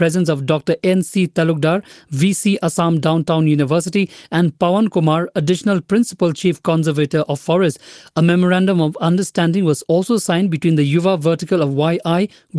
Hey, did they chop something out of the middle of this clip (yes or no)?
no